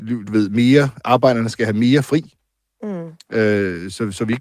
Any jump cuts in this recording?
no; 0 cuts

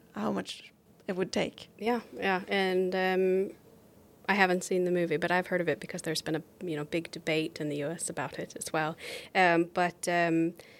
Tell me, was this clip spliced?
no; 0 cuts

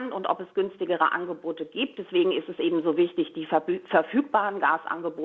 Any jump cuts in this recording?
no; 0 cuts

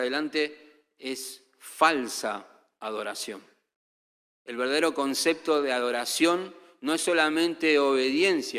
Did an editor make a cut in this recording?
no; 0 cuts

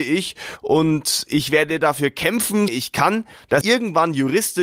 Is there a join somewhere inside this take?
yes; 2 cuts; at 2.7 s, 3.6 s

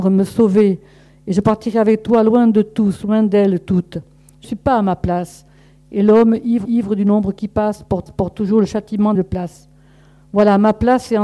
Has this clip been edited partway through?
yes; 4 cuts; at 4.4 s, 6.6 s, 8.1 s, 9.1 s

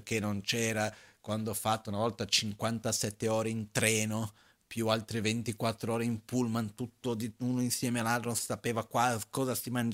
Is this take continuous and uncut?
yes; 0 cuts

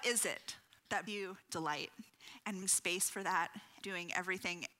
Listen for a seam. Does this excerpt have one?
yes; 3 cuts; at 1.1 s, 2.6 s, 3.8 s

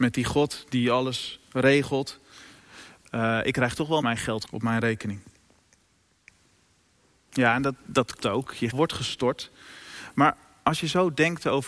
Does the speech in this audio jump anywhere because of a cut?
yes; 4 cuts; at 4.0 s, 4.4 s, 8.2 s, 8.7 s

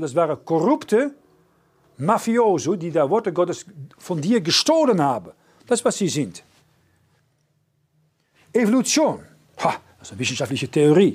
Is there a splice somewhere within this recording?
no; 0 cuts

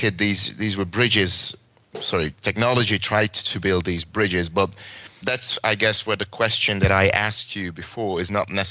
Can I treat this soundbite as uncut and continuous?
no; 1 cut; at 5.2 s

